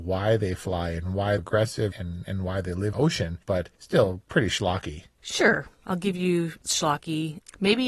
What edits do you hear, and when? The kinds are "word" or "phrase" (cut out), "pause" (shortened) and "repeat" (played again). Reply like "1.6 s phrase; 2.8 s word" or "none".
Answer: 1.4 s phrase; 1.9 s word; 2.9 s phrase; 3.7 s pause; 5.1 s pause